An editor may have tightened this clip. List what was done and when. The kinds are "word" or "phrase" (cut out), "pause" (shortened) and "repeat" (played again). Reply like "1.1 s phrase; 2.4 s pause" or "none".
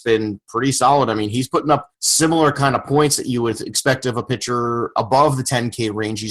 1.9 s pause